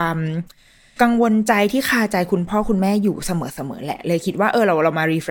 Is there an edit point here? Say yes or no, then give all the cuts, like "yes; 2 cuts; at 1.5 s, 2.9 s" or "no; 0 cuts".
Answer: no; 0 cuts